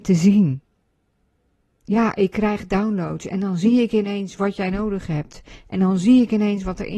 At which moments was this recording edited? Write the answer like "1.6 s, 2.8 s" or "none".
none

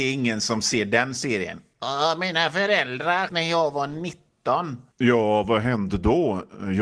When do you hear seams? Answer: 3.3 s, 4.9 s

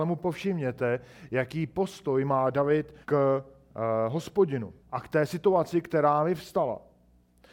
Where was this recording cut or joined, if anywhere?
3.0 s, 4.8 s

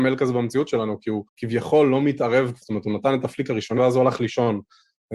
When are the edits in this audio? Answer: 1.3 s, 2.6 s, 3.8 s

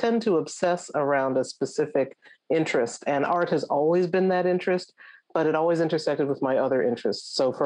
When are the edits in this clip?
none

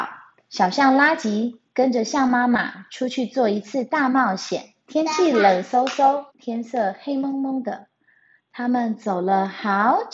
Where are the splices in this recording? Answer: 4.8 s, 6.3 s

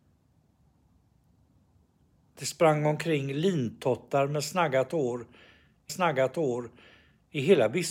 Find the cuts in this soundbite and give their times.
5.9 s

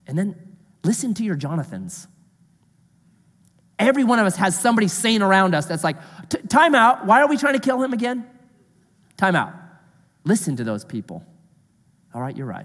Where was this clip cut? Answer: none

